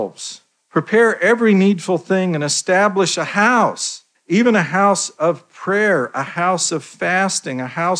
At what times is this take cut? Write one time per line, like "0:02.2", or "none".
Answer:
0:04.1